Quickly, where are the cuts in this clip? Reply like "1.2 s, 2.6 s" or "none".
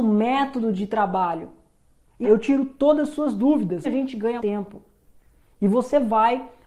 2.2 s, 3.8 s, 4.4 s

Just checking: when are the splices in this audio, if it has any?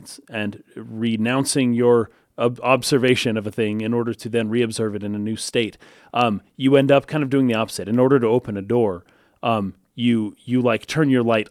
none

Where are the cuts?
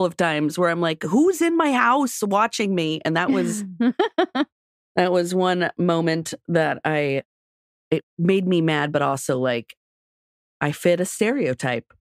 none

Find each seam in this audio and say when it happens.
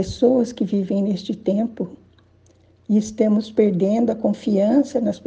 none

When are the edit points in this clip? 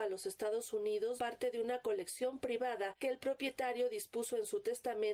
1.2 s, 3.0 s

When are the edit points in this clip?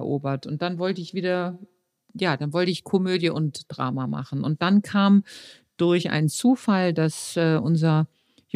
none

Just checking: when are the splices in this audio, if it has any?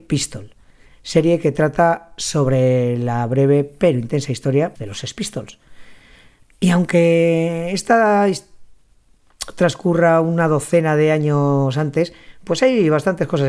4.8 s

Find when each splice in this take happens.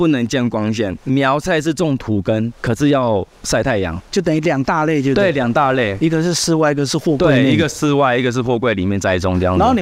1.0 s, 4.0 s

